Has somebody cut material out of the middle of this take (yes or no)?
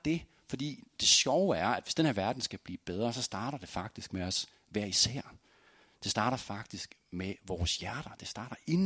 no